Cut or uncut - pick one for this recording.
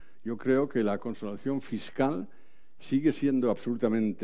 uncut